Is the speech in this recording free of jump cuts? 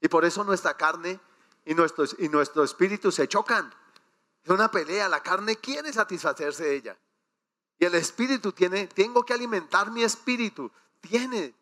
yes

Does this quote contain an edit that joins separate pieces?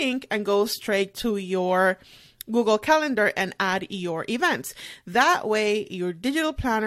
no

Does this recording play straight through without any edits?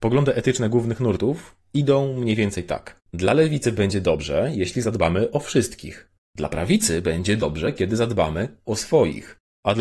no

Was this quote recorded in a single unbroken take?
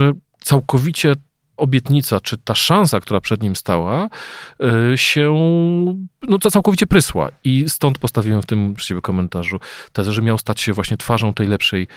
no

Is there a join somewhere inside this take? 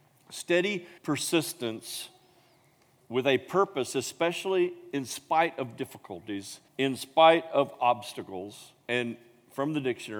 yes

